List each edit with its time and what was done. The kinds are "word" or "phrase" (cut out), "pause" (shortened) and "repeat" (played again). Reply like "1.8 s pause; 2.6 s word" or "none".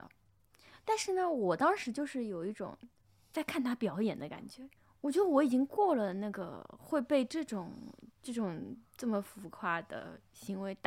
8.1 s pause